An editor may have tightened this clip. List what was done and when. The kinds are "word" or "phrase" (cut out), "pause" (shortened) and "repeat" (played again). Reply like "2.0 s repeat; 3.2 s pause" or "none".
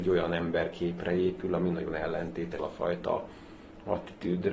2.6 s word

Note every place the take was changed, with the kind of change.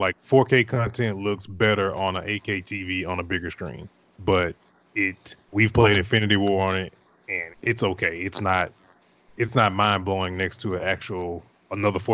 5.4 s pause; 7.5 s word

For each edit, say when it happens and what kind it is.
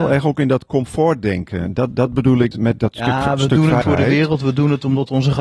2.5 s word; 3.8 s word

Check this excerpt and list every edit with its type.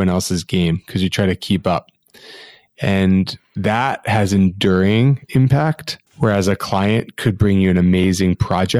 3.4 s pause; 6.1 s pause

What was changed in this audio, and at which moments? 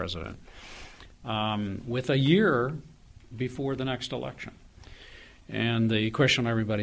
none

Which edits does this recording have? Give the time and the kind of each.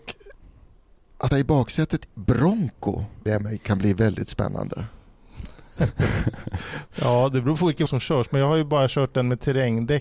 1.3 s word; 2.1 s word; 3.3 s word; 7.9 s word

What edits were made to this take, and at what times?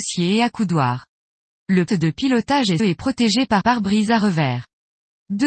1.9 s word; 2.8 s word; 3.6 s word

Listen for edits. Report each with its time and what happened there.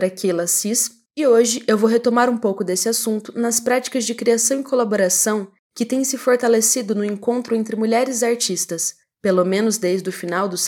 none

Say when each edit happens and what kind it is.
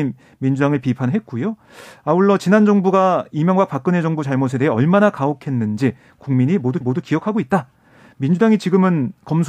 6.8 s repeat

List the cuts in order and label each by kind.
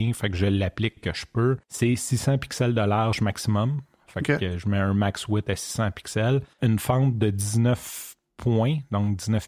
1.0 s word; 1.6 s pause; 6.5 s pause

